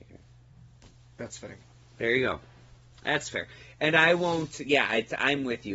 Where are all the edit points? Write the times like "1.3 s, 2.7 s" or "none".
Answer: none